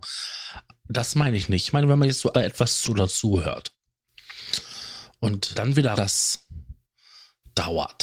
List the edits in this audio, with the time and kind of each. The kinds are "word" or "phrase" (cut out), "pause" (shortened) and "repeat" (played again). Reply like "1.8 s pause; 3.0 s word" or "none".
2.3 s word; 2.8 s word; 5.5 s word; 5.9 s word